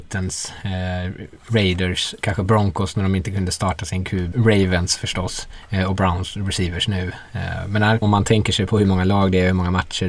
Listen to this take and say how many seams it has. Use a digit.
2